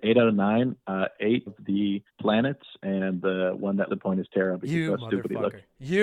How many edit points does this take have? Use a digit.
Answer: 3